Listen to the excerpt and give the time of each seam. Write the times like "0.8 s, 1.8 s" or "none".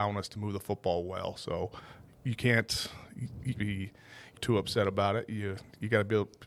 2.1 s, 3.5 s, 4.4 s